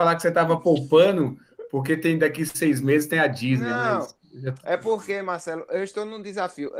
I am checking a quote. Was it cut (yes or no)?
no